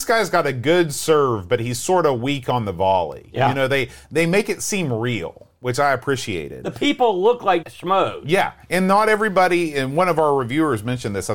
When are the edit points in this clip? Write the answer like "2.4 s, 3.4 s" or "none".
7.6 s